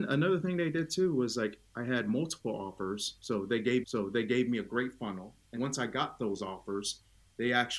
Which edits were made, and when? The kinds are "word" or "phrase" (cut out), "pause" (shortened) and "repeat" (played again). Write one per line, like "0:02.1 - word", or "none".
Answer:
0:03.8 - repeat
0:05.6 - word